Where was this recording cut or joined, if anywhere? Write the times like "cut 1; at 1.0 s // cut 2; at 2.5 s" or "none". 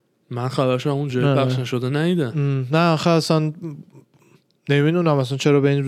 none